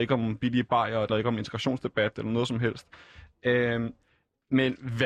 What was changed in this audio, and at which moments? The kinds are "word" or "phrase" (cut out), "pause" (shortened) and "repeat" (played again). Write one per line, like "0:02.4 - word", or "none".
0:01.1 - word

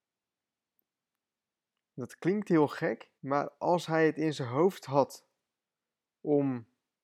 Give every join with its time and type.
0:03.2 - pause

